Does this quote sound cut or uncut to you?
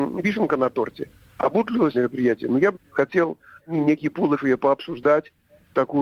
cut